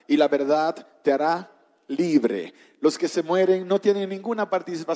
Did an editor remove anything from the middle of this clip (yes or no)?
no